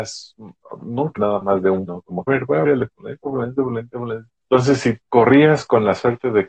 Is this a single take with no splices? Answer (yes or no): no